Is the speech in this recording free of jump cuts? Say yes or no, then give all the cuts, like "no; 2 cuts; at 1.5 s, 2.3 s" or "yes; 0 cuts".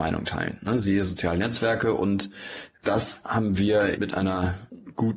no; 1 cut; at 4.0 s